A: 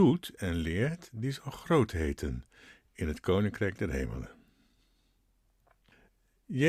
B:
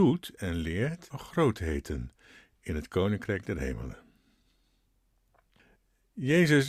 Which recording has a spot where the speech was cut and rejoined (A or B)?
B